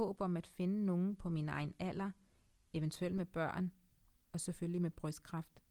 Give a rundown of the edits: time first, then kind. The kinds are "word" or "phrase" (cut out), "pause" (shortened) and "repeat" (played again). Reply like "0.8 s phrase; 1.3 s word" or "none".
none